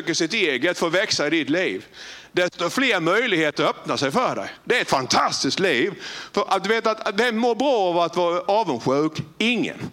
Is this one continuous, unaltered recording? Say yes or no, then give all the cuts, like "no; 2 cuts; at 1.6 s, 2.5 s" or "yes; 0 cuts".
yes; 0 cuts